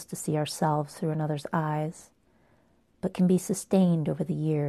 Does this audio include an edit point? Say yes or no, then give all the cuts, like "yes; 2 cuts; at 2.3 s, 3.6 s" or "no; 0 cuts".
no; 0 cuts